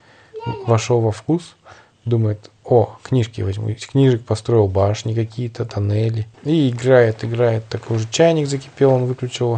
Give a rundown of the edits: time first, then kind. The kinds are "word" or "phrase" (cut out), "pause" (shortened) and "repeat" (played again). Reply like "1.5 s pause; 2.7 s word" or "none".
6.3 s pause